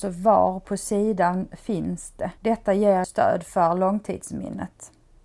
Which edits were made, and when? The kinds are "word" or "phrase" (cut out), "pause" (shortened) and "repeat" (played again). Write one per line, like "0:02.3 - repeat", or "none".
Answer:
0:02.4 - pause
0:03.0 - word